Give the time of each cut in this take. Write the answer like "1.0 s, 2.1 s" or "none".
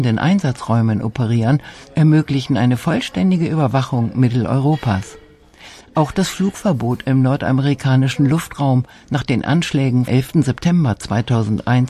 10.1 s